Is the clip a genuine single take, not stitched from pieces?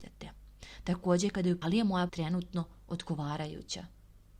no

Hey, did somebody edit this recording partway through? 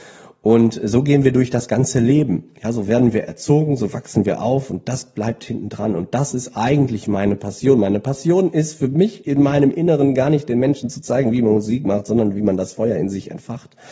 no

